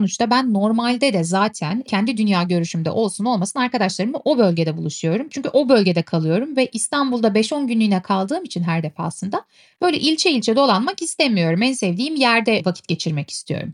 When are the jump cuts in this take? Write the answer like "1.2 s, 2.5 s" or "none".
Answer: none